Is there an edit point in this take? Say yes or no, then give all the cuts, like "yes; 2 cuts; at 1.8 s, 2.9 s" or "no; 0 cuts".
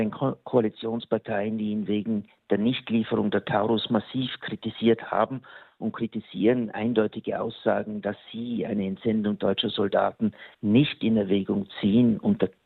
yes; 1 cut; at 10.5 s